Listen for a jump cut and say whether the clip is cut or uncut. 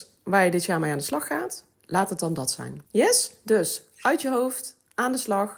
cut